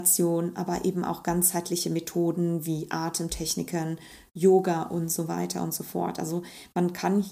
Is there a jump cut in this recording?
no; 0 cuts

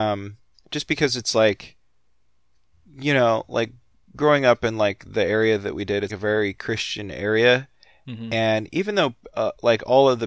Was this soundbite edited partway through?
yes; 1 cut; at 6.1 s

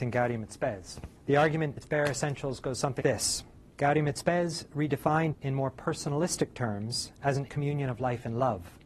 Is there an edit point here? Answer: yes; 7 cuts; at 1.2 s, 1.8 s, 3.0 s, 3.7 s, 5.3 s, 7.1 s, 7.5 s

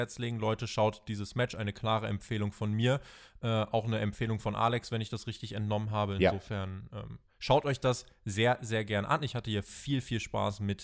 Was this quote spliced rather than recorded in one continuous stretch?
no; 0 cuts

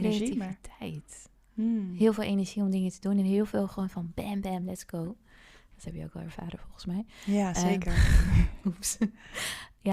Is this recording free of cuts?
yes; 0 cuts

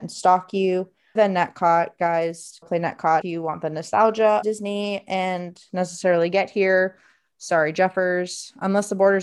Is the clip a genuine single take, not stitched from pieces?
no; 5 cuts; at 1.2 s, 2.6 s, 3.2 s, 4.4 s, 5.7 s

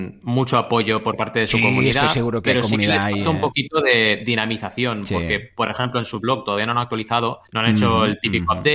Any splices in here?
yes; 1 cut; at 7.5 s

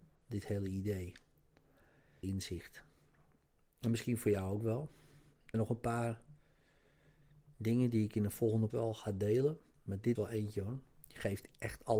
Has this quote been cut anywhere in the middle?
yes; 4 cuts; at 2.2 s, 5.5 s, 8.7 s, 10.1 s

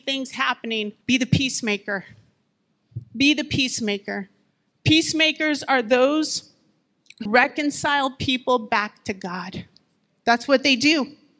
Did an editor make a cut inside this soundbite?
yes; 3 cuts; at 1.0 s, 4.5 s, 7.3 s

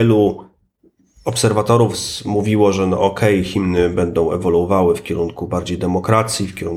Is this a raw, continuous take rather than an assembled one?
yes; 0 cuts

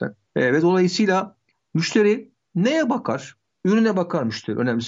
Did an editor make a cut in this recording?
no; 0 cuts

